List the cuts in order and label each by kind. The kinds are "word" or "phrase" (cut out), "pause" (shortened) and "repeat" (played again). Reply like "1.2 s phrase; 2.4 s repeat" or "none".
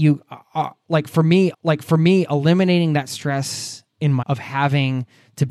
1.5 s repeat; 4.2 s word